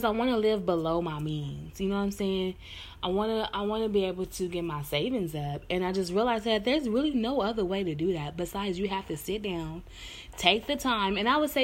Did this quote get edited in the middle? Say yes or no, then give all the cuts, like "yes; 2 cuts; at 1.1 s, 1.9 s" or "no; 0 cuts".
no; 0 cuts